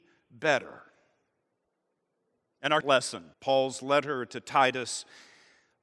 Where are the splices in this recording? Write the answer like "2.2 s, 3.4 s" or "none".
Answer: 2.8 s, 3.3 s